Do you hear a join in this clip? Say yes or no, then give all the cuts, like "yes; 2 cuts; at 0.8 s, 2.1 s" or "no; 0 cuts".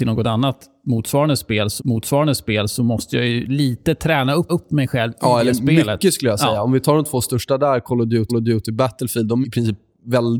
yes; 4 cuts; at 1.8 s, 4.5 s, 8.3 s, 9.4 s